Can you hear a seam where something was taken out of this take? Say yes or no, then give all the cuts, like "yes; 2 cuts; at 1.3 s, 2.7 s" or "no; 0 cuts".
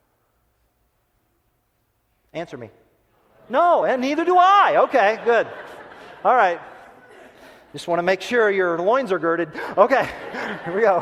no; 0 cuts